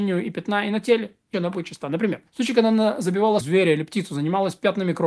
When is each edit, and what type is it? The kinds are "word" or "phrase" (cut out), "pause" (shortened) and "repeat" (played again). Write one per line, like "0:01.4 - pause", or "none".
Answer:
0:01.3 - phrase
0:02.3 - pause
0:03.4 - word